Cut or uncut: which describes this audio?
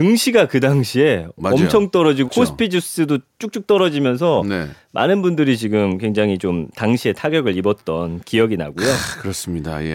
cut